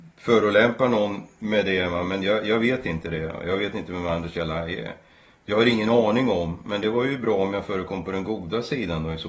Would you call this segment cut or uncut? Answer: uncut